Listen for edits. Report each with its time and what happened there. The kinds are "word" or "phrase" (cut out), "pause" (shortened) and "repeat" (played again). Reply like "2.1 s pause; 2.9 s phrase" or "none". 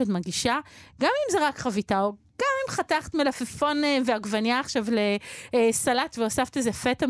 none

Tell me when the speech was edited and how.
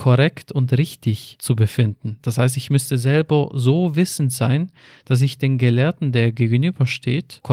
none

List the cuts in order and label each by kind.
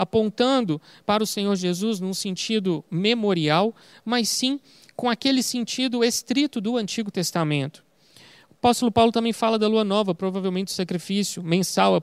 none

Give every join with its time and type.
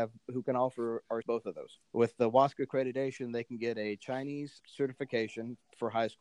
1.2 s word; 1.9 s pause; 4.6 s word

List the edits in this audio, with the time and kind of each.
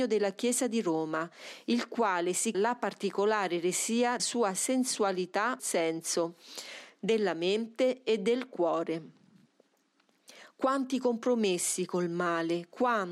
2.5 s word; 4.2 s word; 5.6 s word

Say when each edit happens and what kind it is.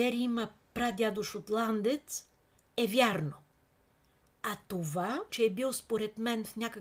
5.3 s phrase

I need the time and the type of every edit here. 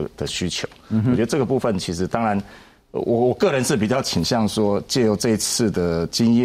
none

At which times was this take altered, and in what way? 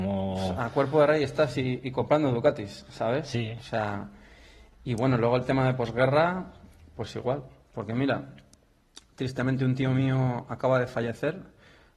none

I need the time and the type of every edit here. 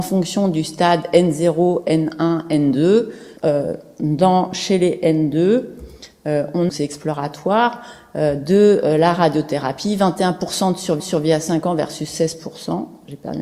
3.4 s pause; 6.7 s phrase; 11.0 s repeat

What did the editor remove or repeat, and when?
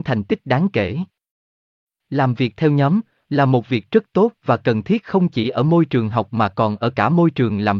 none

